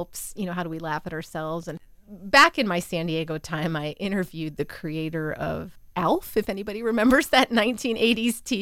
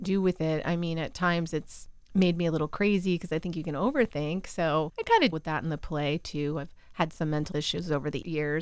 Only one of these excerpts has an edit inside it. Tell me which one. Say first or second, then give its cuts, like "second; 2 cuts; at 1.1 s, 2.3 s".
second; 2 cuts; at 5.3 s, 7.5 s